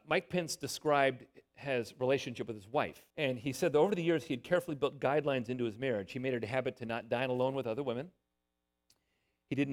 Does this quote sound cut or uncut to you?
cut